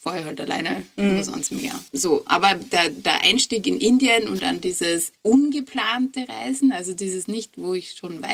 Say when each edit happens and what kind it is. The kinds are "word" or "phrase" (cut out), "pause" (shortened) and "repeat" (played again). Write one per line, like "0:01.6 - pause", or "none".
0:01.9 - pause